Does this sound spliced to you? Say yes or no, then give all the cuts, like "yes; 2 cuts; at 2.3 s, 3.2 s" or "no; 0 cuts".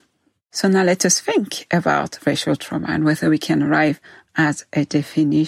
no; 0 cuts